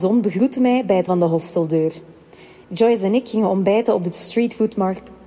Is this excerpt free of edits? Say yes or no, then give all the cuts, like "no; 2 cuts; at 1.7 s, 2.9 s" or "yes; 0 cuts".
no; 1 cut; at 1.1 s